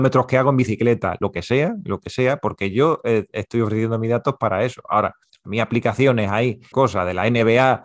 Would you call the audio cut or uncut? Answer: cut